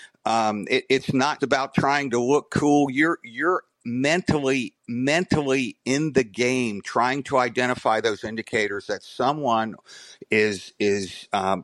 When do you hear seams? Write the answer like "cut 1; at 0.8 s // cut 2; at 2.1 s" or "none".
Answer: cut 1; at 1.4 s // cut 2; at 4.8 s